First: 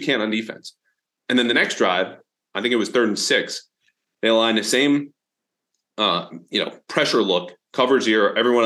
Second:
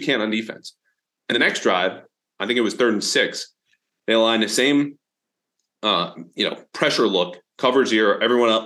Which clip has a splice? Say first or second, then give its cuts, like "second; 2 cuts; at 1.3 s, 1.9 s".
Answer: second; 1 cut; at 1.3 s